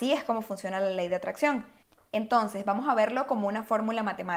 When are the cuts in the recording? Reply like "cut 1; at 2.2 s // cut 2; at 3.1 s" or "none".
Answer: none